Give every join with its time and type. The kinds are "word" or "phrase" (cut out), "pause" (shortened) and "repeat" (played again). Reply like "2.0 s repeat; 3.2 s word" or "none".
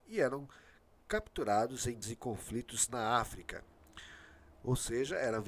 2.0 s word; 2.9 s word